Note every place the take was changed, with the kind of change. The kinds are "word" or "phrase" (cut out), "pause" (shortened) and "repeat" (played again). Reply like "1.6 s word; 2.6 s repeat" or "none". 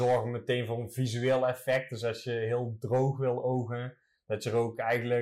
none